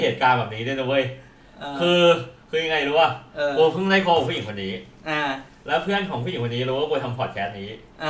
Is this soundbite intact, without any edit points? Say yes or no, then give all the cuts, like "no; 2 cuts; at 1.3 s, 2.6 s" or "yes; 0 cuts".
yes; 0 cuts